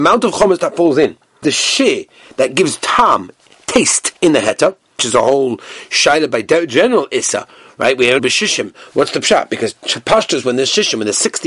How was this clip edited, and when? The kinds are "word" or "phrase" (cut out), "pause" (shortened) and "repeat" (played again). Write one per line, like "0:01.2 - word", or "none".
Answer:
0:01.4 - word
0:04.2 - pause
0:05.0 - word
0:08.2 - phrase